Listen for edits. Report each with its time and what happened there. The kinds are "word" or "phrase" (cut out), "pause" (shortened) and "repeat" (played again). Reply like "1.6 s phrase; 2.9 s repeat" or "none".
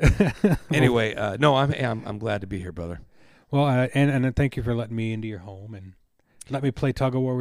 none